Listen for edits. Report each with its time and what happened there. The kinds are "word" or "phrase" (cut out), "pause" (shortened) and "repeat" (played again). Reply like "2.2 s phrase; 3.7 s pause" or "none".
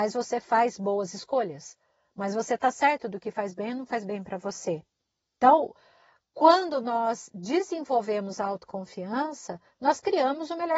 none